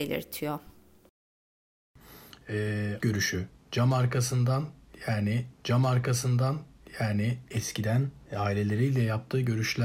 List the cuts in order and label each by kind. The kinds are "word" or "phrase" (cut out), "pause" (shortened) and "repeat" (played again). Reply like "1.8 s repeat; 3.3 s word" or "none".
3.0 s word; 5.5 s repeat